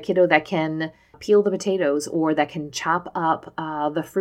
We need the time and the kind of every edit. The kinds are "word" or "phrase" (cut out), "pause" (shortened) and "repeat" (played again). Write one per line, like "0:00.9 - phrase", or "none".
0:01.1 - word